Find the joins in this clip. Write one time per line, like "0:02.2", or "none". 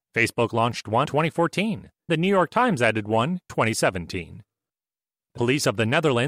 0:01.1
0:02.1
0:03.5
0:05.4